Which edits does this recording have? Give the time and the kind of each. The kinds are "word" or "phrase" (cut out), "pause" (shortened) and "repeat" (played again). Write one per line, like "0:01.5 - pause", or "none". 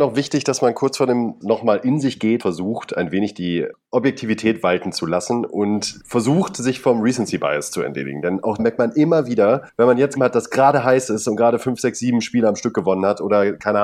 0:01.4 - word
0:02.4 - word
0:08.6 - word
0:10.2 - phrase